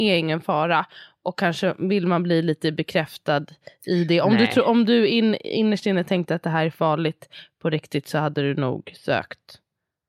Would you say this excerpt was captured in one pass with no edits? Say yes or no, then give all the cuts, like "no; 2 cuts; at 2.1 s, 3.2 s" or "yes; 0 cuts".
yes; 0 cuts